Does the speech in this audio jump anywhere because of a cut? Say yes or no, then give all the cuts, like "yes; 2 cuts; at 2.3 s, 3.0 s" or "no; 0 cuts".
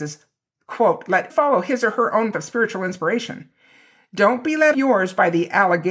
yes; 3 cuts; at 1.3 s, 2.3 s, 4.7 s